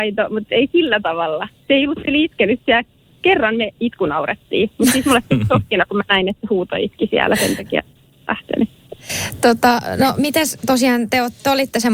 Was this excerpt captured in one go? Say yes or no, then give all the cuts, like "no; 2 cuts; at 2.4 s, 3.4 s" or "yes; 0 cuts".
yes; 0 cuts